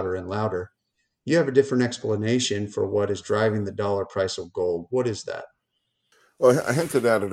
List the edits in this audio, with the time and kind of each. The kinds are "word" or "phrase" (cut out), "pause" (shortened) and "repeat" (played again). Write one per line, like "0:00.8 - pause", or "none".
none